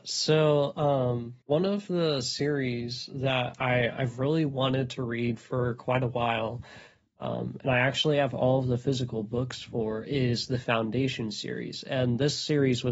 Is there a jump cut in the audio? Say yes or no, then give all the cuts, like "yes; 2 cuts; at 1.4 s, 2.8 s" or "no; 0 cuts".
yes; 1 cut; at 1.4 s